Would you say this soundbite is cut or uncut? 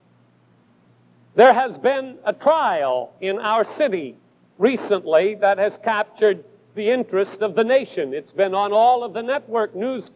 uncut